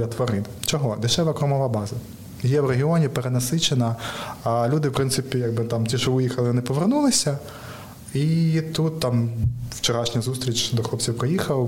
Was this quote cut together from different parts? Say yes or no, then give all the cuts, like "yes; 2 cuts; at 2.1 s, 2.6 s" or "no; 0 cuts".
no; 0 cuts